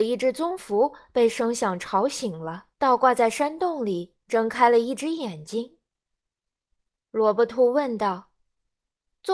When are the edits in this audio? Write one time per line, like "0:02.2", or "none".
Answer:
0:02.7
0:04.2

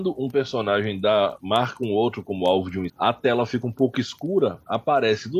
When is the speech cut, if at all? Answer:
0:02.9

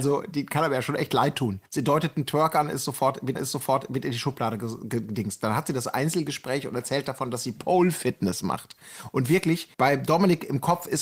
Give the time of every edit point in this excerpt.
0:01.7
0:03.3
0:09.7

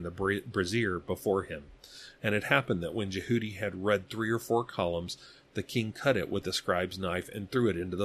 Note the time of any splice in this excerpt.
none

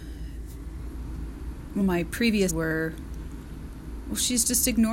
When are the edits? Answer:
0:01.8
0:02.5

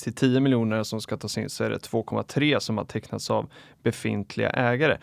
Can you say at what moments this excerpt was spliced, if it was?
none

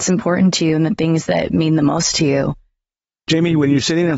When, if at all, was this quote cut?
none

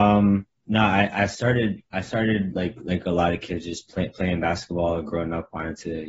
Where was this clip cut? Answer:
none

